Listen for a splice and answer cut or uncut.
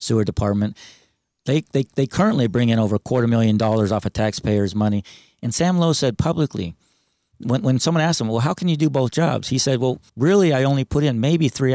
cut